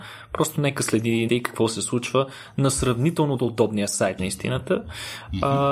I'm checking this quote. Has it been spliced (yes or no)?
yes